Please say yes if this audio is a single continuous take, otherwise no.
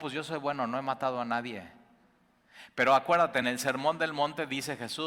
yes